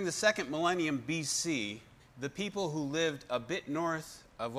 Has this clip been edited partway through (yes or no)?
yes